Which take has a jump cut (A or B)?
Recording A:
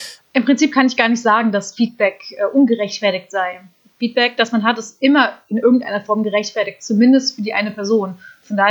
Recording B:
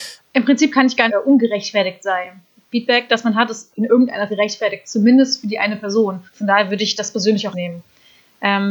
B